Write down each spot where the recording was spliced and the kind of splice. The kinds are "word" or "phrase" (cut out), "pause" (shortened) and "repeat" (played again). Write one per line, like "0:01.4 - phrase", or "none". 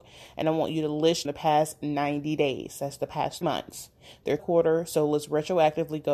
0:01.2 - phrase
0:03.4 - word
0:04.4 - phrase